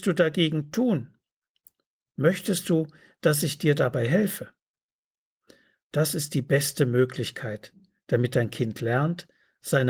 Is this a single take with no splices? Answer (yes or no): yes